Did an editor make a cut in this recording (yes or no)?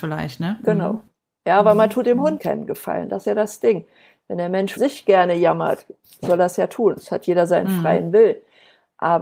yes